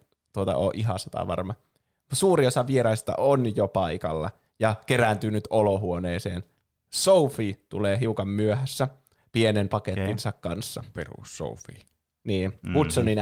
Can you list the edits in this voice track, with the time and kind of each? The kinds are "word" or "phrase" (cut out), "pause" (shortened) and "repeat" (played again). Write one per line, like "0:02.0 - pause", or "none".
none

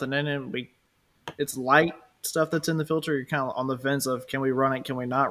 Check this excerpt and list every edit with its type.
none

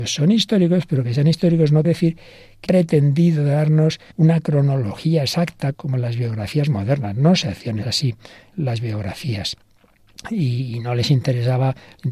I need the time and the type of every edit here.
0:01.8 - word
0:02.7 - word
0:04.1 - pause
0:05.7 - word
0:07.8 - word
0:08.5 - word

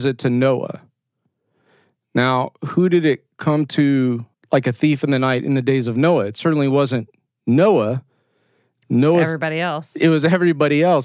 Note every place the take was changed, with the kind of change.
0:04.3 - pause

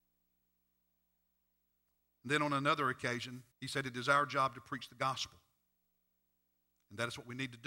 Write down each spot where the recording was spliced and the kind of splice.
0:03.5 - pause

